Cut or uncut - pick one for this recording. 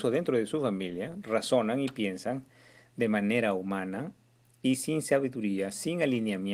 uncut